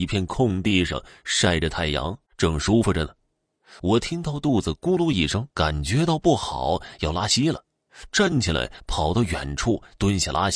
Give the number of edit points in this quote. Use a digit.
2